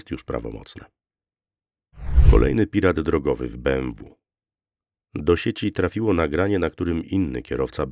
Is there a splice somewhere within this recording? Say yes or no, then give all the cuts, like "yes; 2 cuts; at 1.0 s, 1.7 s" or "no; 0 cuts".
no; 0 cuts